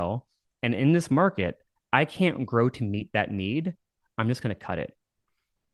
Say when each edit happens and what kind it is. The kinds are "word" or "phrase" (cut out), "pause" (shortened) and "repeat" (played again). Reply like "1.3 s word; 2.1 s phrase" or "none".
none

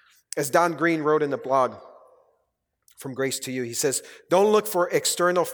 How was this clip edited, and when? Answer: none

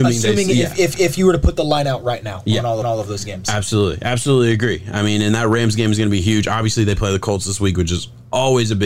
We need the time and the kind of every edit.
0.9 s repeat; 2.8 s repeat

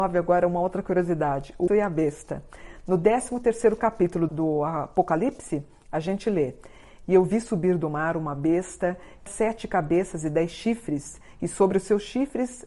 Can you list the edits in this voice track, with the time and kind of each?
1.7 s word; 4.3 s word; 9.3 s word

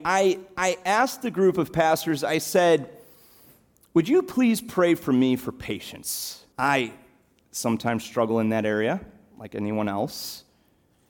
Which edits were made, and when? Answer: 6.5 s pause

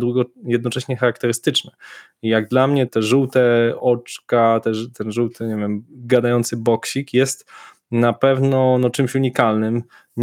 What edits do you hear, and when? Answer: 2.9 s word

